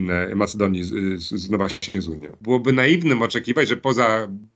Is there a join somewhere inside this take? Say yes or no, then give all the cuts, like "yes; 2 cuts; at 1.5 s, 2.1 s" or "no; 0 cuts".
no; 0 cuts